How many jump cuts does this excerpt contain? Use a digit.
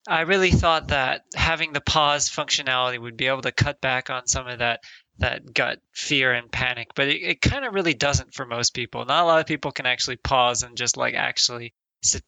0